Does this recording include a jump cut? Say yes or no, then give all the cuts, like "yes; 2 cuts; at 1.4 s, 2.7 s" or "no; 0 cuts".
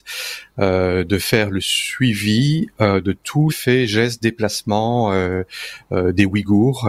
yes; 1 cut; at 3.5 s